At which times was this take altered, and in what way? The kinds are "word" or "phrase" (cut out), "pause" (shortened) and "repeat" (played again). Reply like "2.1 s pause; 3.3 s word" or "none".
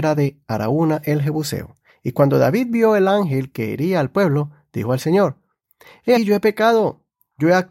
6.2 s word